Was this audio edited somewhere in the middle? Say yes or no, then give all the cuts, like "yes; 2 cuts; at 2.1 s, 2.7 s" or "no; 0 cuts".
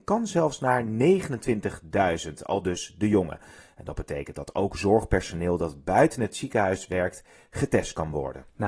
no; 0 cuts